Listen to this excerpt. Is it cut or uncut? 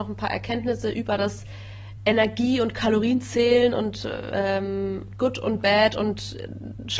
uncut